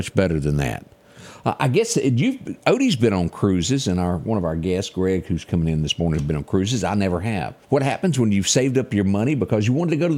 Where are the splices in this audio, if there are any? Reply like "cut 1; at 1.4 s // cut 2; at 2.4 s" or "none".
cut 1; at 7.6 s